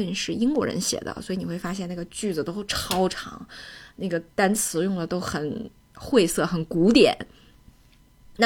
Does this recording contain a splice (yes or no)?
yes